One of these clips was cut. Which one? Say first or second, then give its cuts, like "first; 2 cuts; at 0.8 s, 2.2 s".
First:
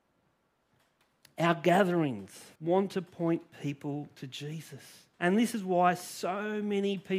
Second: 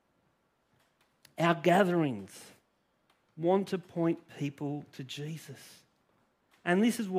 first; 2 cuts; at 2.6 s, 5.1 s